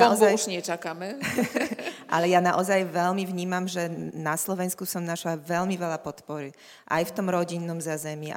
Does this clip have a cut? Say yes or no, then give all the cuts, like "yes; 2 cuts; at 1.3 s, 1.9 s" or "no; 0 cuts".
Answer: no; 0 cuts